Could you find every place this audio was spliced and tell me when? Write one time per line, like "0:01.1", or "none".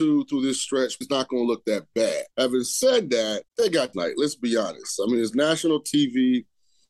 0:01.0
0:02.3
0:03.5
0:03.9